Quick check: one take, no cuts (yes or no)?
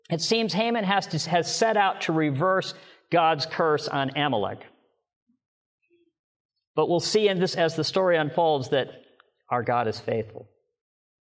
yes